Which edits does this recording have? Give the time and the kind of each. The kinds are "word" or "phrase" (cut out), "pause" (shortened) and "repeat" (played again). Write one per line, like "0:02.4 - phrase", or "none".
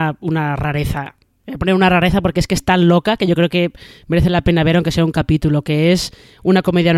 none